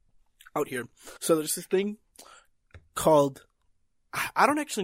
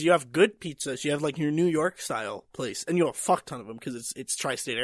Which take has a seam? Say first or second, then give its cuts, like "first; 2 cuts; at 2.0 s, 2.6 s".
first; 1 cut; at 1.2 s